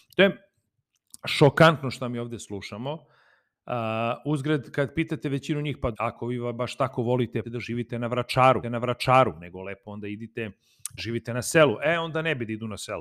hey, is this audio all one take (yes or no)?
no